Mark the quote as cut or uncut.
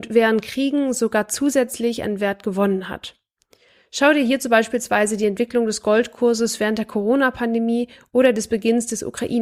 uncut